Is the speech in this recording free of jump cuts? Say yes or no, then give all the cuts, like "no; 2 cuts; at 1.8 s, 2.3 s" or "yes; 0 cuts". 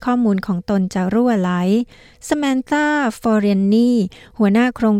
yes; 0 cuts